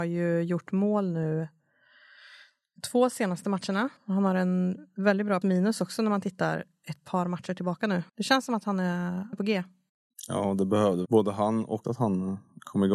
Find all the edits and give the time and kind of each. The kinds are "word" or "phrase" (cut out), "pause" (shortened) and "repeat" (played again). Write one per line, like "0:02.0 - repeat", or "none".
0:04.0 - pause
0:05.4 - word
0:08.1 - pause
0:09.3 - word
0:11.0 - word
0:11.8 - word